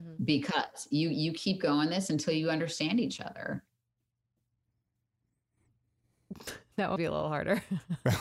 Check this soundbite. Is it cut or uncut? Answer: cut